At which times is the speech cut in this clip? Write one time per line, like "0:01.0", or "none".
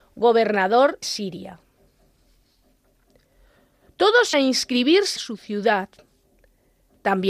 0:01.0
0:04.3
0:05.2